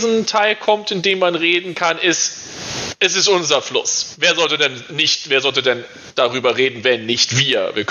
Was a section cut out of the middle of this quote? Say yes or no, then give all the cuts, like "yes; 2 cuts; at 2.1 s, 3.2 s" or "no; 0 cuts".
no; 0 cuts